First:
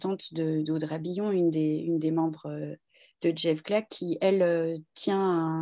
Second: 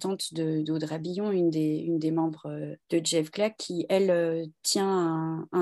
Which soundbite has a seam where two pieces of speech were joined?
second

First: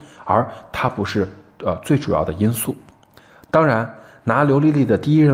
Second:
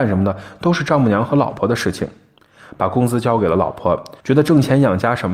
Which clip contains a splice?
second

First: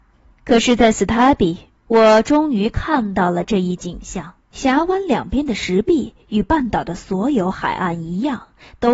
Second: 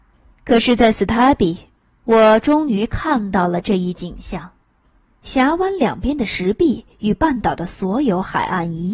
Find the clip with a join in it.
first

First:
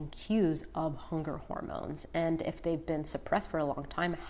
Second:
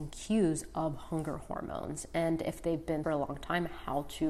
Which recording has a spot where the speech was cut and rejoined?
second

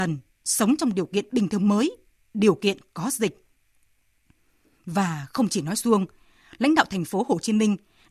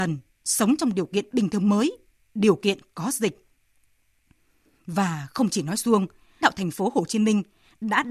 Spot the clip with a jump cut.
second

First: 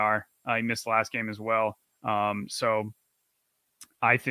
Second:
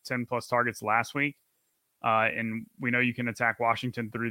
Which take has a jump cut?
first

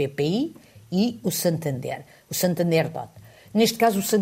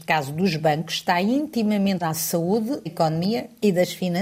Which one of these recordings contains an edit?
second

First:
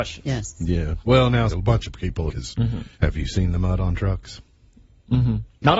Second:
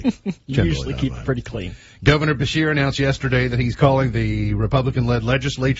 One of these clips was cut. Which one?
first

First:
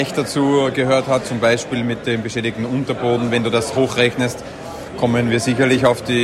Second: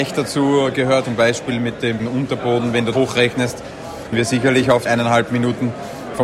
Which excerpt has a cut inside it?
second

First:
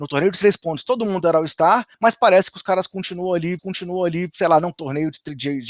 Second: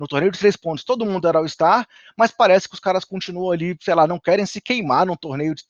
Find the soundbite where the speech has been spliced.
first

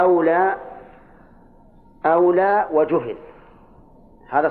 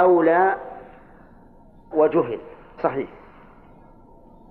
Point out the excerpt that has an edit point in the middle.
second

